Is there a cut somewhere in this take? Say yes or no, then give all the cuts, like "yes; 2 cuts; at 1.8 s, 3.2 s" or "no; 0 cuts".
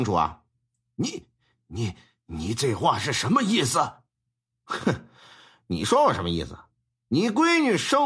no; 0 cuts